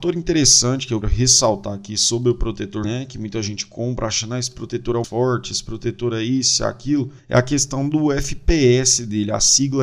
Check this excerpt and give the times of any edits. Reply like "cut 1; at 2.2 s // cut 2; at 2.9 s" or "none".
cut 1; at 1.0 s // cut 2; at 2.8 s // cut 3; at 5.0 s // cut 4; at 7.2 s